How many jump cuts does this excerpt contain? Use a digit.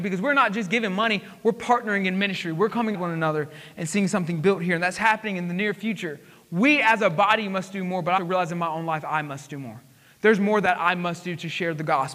2